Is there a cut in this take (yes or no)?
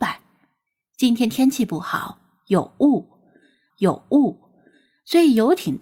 yes